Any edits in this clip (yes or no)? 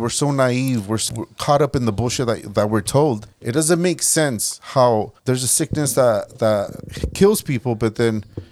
yes